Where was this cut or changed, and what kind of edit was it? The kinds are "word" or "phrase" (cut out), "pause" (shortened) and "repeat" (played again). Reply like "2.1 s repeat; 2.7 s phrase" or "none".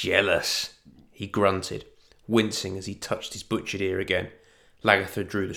none